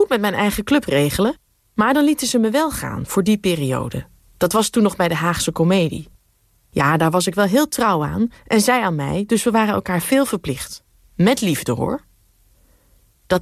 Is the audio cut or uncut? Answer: uncut